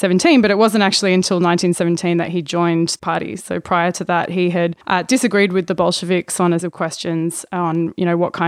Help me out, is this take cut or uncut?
cut